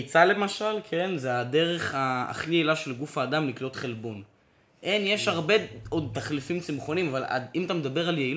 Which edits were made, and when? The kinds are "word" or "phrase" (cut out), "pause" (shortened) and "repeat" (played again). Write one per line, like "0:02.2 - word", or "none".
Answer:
none